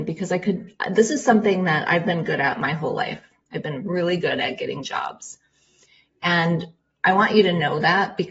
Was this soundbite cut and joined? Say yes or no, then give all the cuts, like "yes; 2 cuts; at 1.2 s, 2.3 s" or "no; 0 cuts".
no; 0 cuts